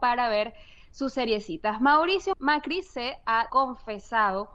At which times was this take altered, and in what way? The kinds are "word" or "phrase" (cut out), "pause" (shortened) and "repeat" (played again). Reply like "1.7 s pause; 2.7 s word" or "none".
2.3 s word; 3.5 s word